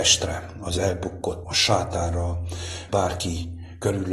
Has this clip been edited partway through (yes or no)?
yes